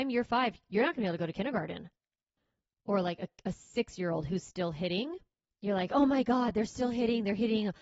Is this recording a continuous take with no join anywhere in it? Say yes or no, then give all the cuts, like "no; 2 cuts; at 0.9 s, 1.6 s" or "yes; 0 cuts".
yes; 0 cuts